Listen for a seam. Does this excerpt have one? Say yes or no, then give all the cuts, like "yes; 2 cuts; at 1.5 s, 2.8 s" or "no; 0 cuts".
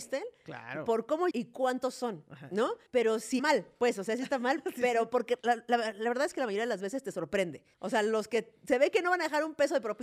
yes; 5 cuts; at 1.3 s, 2.9 s, 3.4 s, 5.4 s, 7.7 s